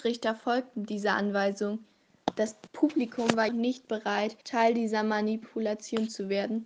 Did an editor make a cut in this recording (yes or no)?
yes